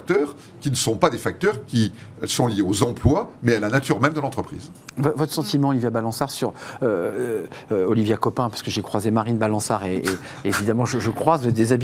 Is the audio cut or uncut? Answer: uncut